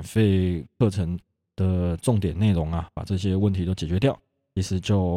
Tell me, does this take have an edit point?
no; 0 cuts

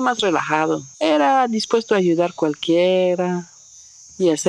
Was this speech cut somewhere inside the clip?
yes; 1 cut; at 0.9 s

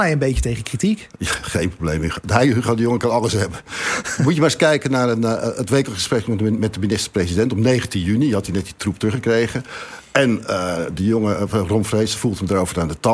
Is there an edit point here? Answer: no; 0 cuts

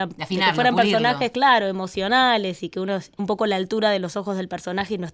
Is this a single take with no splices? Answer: no; 1 cut; at 3.2 s

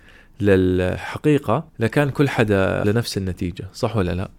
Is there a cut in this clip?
yes; 2 cuts; at 1.7 s, 2.8 s

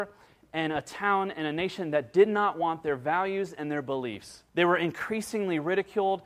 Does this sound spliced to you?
yes; 1 cut; at 4.5 s

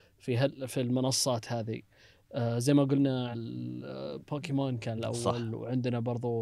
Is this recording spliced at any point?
yes; 2 cuts; at 3.3 s, 5.0 s

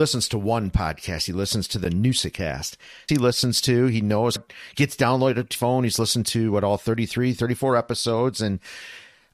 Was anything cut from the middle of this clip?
yes; 3 cuts; at 3.1 s, 4.4 s, 5.5 s

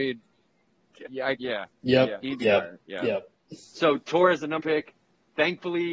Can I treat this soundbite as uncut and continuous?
no; 4 cuts; at 1.1 s, 1.4 s, 2.2 s, 4.6 s

